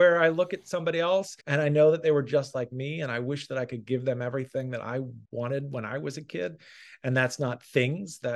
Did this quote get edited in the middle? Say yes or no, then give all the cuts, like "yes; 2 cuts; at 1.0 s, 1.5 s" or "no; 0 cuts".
yes; 2 cuts; at 1.4 s, 5.2 s